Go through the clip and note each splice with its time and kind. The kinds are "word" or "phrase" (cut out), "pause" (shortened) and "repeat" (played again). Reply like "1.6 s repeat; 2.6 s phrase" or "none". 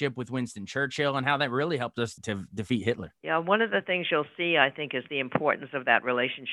3.2 s pause

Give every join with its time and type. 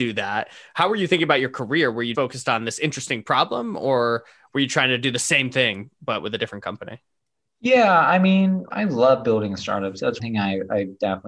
2.1 s word; 8.7 s word; 10.2 s word

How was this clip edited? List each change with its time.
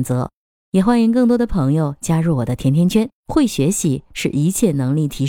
3.2 s pause

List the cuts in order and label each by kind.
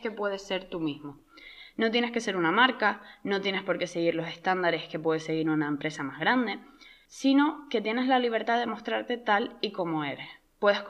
none

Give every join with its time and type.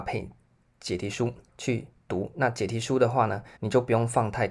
1.5 s pause; 3.6 s pause

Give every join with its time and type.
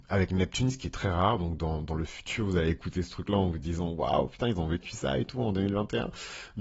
none

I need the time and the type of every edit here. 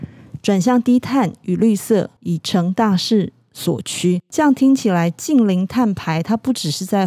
2.2 s pause

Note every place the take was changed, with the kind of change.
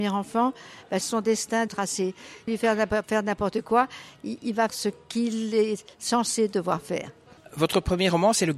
1.0 s phrase; 1.7 s phrase; 2.5 s phrase; 4.7 s word

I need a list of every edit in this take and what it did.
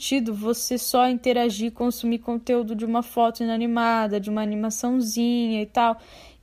none

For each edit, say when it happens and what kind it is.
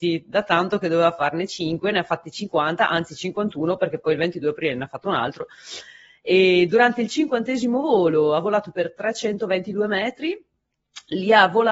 none

